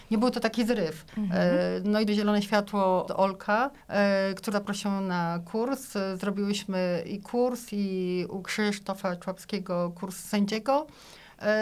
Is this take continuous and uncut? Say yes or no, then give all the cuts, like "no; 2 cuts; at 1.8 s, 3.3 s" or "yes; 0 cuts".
no; 5 cuts; at 1.1 s, 2.1 s, 3.1 s, 3.8 s, 4.5 s